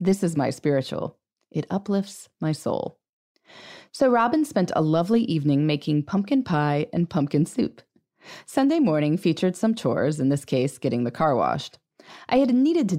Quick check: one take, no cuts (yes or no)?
yes